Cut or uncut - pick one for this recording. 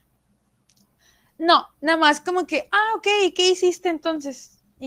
uncut